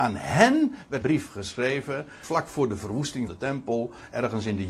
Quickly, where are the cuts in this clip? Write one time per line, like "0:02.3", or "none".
0:01.0
0:02.2
0:03.3